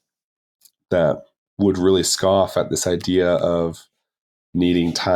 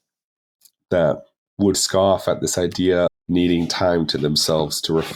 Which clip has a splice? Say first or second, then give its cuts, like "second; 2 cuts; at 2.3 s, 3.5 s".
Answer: second; 2 cuts; at 1.7 s, 3.1 s